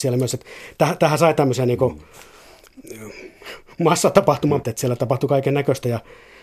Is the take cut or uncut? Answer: cut